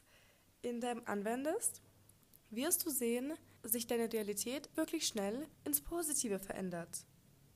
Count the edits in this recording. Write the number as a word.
four